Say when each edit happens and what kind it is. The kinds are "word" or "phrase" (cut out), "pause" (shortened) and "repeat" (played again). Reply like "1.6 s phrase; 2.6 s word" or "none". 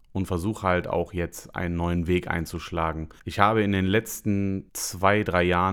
3.2 s pause; 4.7 s pause